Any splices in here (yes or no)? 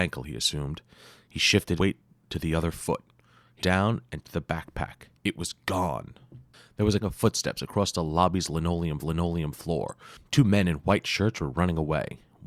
yes